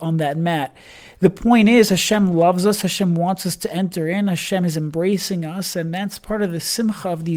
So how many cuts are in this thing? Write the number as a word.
zero